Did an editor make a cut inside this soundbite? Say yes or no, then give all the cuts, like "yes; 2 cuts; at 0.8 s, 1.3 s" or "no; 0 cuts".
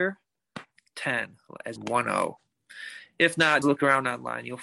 yes; 2 cuts; at 1.8 s, 3.6 s